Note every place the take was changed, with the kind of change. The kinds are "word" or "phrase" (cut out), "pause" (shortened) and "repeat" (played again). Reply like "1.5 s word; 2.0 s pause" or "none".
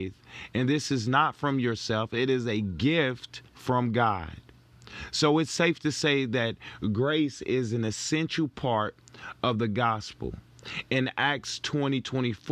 3.5 s pause